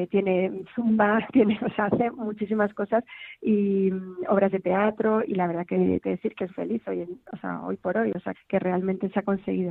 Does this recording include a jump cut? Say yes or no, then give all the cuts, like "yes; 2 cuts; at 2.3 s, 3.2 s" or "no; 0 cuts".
yes; 5 cuts; at 5.3 s, 6.0 s, 6.5 s, 7.2 s, 8.3 s